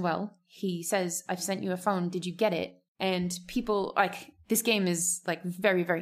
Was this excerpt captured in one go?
no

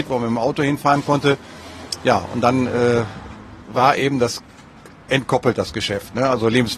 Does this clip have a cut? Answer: no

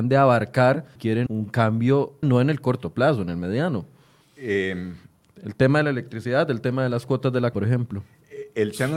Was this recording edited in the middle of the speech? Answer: yes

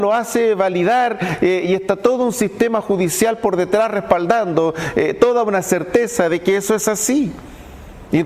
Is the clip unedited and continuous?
yes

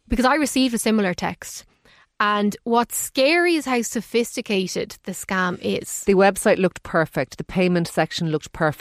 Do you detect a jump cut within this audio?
no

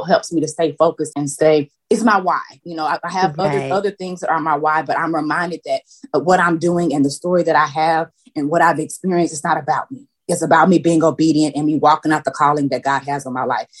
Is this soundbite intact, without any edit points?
no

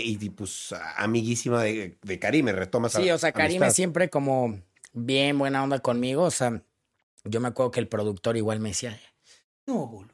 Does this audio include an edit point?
no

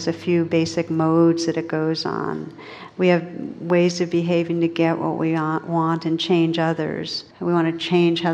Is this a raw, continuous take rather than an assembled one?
no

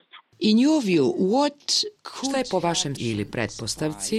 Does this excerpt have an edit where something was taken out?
yes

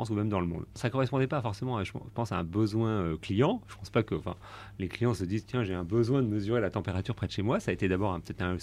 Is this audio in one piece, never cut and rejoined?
yes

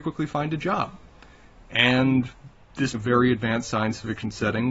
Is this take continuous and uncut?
no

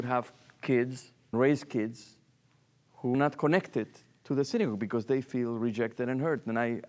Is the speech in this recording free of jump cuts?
no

